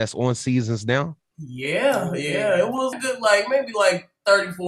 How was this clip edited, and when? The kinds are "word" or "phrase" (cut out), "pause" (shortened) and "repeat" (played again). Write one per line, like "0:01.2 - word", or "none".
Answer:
0:02.9 - word